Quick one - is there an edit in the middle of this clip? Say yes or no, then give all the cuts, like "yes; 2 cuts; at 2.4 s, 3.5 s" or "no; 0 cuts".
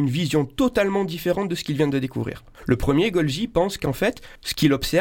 yes; 1 cut; at 2.5 s